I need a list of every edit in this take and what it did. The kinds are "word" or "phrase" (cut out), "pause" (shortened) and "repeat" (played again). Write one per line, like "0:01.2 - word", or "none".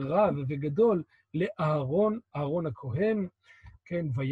none